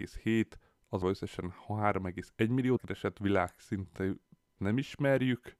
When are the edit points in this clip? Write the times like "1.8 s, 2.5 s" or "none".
1.0 s, 2.8 s, 4.6 s